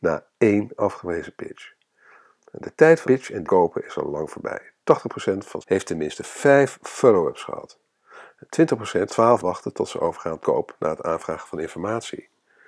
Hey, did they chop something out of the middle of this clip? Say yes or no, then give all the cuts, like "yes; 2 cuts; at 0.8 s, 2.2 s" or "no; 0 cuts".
yes; 6 cuts; at 3.0 s, 3.4 s, 5.6 s, 9.1 s, 9.4 s, 10.4 s